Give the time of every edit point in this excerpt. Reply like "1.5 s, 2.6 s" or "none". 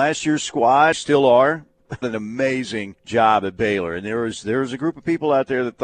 0.9 s, 2.0 s, 3.0 s